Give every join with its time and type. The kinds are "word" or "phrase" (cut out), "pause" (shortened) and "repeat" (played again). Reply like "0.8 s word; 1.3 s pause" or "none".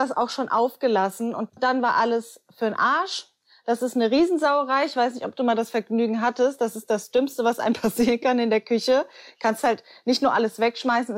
none